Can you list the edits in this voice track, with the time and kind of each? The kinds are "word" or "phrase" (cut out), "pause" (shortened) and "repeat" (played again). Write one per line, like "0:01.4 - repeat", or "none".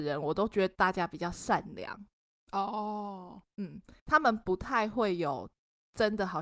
none